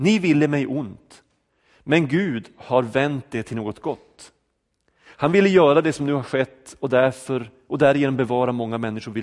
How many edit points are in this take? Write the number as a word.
zero